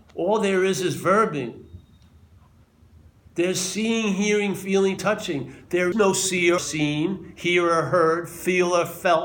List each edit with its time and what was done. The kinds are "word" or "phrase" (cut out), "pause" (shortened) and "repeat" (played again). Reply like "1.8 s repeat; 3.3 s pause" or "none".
5.0 s word; 5.9 s word; 6.6 s word